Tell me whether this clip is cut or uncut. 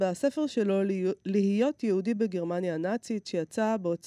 uncut